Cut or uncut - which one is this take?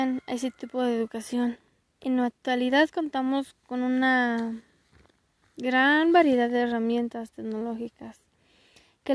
cut